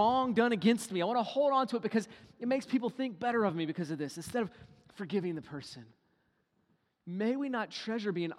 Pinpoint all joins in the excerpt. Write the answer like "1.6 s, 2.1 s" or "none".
none